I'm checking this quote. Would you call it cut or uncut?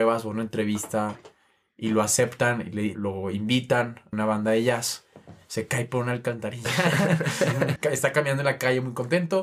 cut